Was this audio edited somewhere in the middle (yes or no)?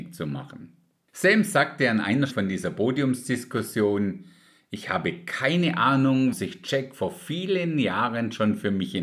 yes